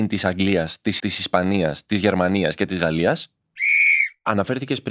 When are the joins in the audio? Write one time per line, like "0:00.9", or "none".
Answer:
0:01.0

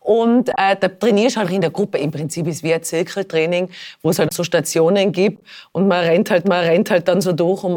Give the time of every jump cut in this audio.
0:01.4
0:04.3
0:06.4

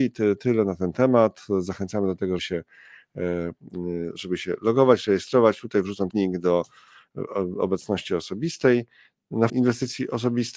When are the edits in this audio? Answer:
0:02.4
0:06.1
0:09.5

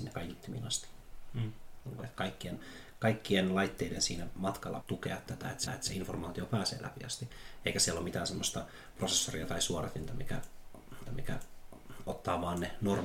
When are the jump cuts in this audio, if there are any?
0:04.8
0:05.7
0:11.1

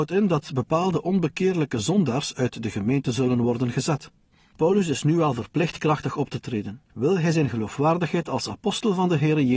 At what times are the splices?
none

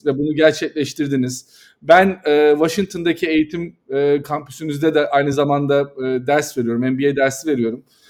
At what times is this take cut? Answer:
none

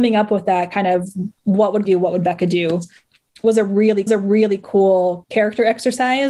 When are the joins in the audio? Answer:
0:01.3
0:01.8
0:04.1

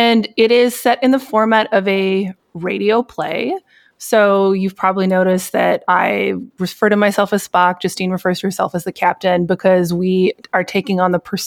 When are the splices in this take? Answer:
none

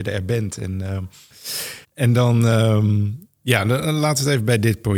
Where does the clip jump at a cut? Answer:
0:01.8

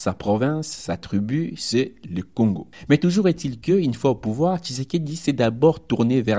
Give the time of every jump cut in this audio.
none

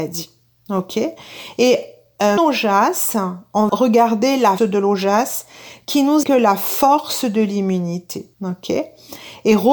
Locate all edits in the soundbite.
0:02.4
0:03.7
0:04.6
0:06.2
0:08.3

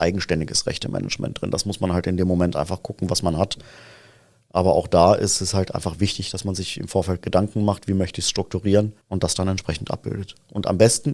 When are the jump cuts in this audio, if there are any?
0:09.0

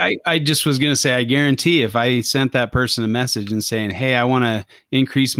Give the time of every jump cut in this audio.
none

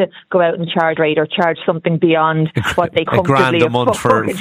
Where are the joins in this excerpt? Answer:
0:01.0
0:03.1

